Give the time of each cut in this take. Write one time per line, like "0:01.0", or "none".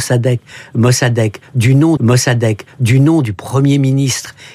0:02.0

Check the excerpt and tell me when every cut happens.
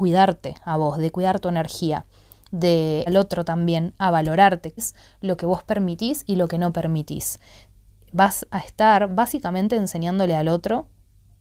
0:03.1
0:04.8

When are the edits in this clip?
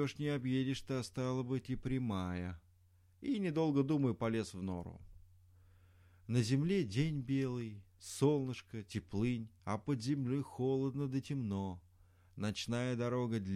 0:09.6

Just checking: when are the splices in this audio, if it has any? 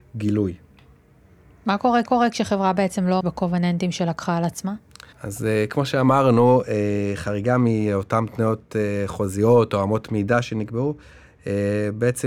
0:02.1
0:03.2
0:05.1

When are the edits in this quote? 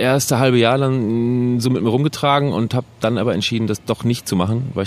none

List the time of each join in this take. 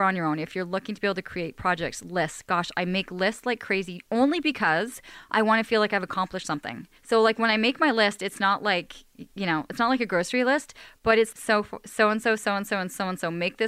0:07.0
0:11.3

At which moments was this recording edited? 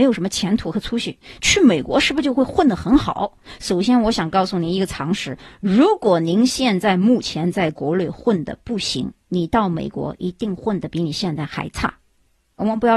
0:09.2

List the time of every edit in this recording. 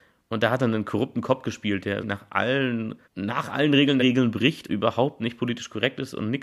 0:02.0
0:03.0
0:04.0
0:04.7

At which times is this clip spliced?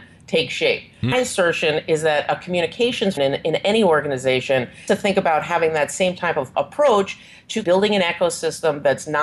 0:01.1
0:03.2
0:04.9
0:06.5
0:07.6

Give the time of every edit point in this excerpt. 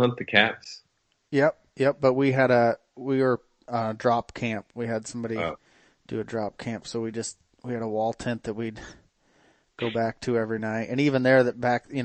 none

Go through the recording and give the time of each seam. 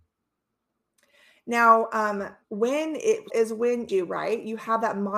0:02.4
0:03.3
0:03.9

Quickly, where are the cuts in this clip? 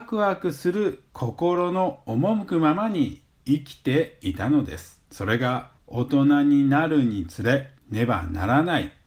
0:01.1
0:05.1
0:05.8
0:07.8

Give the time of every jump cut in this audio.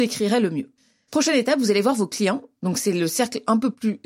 none

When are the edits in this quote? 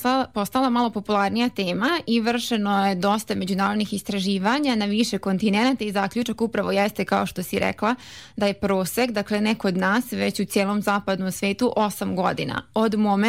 none

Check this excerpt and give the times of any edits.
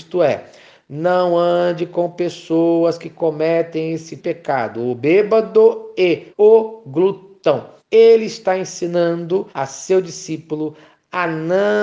0:04.2
0:06.3
0:07.8
0:09.5

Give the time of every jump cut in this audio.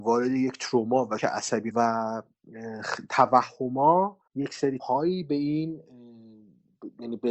0:01.2
0:01.7
0:04.3
0:04.8

